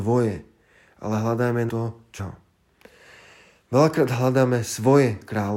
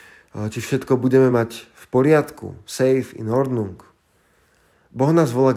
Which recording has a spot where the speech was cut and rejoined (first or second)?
first